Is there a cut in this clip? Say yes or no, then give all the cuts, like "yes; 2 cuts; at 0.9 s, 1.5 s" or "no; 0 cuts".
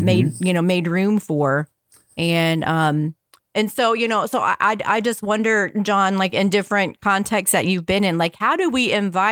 no; 0 cuts